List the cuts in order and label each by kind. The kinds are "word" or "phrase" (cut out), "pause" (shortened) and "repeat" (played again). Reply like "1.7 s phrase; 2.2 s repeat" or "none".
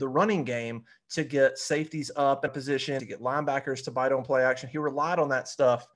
2.5 s word; 3.0 s word

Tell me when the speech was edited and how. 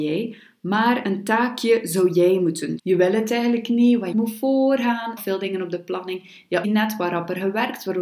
1.0 s word; 2.8 s word; 4.1 s phrase; 5.2 s phrase; 6.6 s word

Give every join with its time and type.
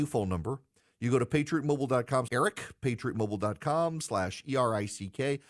2.3 s word

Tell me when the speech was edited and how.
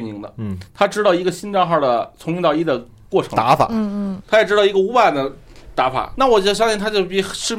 6.2 s word

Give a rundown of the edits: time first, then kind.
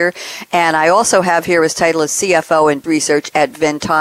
2.8 s word

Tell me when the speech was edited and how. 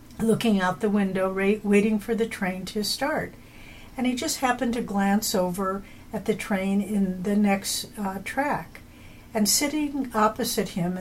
none

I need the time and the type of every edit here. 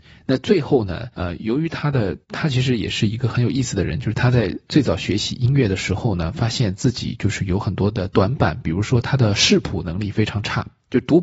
1.1 s pause; 2.2 s pause

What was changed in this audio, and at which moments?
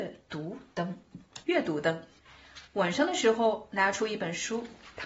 1.4 s pause; 2.7 s pause

